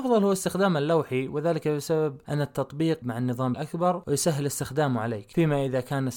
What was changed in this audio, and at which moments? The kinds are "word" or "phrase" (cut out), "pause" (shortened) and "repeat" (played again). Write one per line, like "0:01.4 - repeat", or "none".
0:03.0 - word
0:03.5 - word